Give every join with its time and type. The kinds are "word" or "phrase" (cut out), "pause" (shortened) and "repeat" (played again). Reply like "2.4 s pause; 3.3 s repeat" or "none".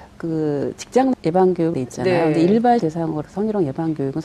1.1 s word; 1.7 s word; 2.8 s word; 3.2 s word

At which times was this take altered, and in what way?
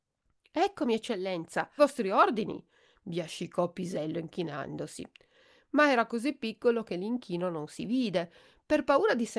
1.8 s word

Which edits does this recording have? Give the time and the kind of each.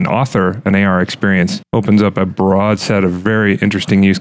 none

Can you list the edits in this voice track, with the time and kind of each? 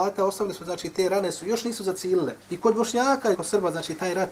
2.4 s pause; 3.3 s phrase

